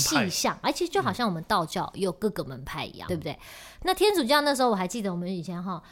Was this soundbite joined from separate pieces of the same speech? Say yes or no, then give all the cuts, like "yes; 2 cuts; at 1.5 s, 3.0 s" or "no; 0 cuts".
yes; 1 cut; at 3.1 s